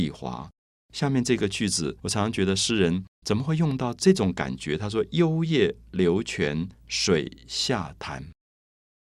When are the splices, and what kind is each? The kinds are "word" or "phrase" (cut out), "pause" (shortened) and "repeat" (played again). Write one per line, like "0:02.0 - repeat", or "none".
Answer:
0:02.0 - pause
0:03.1 - pause
0:06.7 - pause